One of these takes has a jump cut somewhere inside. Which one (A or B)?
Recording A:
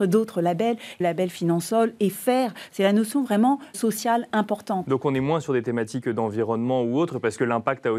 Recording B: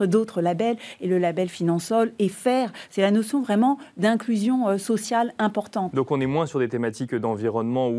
A